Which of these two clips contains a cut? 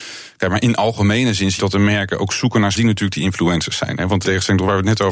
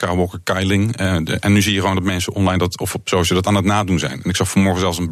first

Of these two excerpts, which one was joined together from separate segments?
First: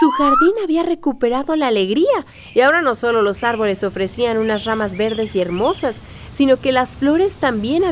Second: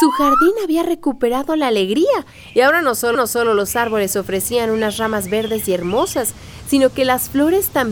second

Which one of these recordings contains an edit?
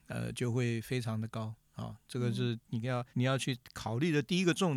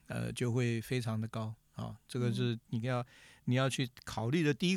first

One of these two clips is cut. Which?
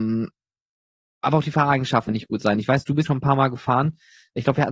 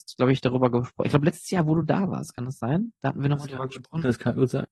first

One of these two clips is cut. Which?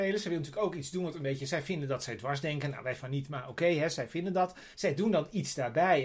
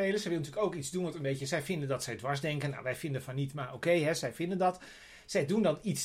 first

